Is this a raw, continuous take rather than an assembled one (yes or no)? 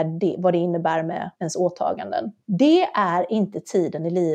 no